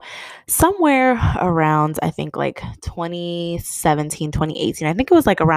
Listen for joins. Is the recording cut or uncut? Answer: uncut